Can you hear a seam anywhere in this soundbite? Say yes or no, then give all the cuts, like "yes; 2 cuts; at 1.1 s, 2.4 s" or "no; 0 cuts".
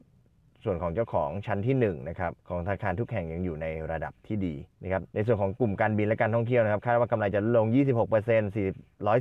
yes; 3 cuts; at 2.4 s, 4.7 s, 5.1 s